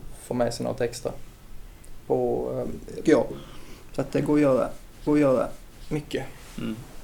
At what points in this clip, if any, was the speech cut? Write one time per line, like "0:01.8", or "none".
0:03.1
0:05.1